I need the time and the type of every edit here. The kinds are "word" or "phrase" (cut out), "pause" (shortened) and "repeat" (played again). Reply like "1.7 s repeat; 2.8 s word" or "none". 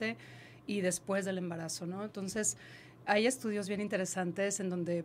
3.1 s word